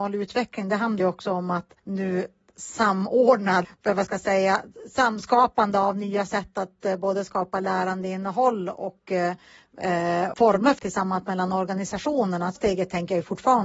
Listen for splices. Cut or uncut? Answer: cut